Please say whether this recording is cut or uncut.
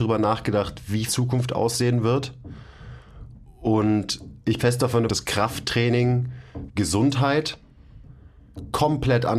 cut